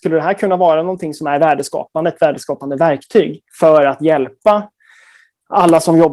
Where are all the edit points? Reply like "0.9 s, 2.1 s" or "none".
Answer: 3.5 s